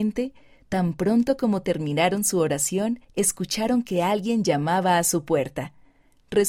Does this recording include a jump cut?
yes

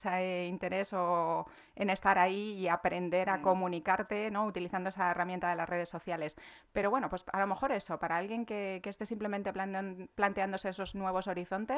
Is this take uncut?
yes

